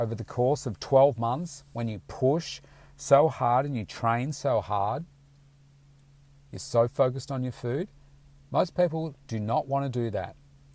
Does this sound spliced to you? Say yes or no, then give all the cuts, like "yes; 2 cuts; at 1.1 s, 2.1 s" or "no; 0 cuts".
no; 0 cuts